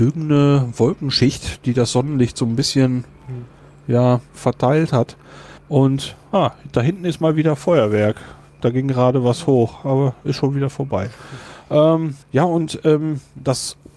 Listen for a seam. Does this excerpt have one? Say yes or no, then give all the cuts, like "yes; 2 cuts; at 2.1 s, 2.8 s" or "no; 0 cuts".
yes; 3 cuts; at 4.3 s, 5.6 s, 12.2 s